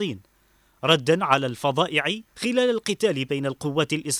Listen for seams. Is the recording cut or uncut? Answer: cut